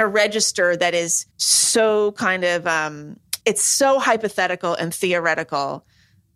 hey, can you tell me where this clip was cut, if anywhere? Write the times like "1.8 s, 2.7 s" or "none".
1.3 s, 3.4 s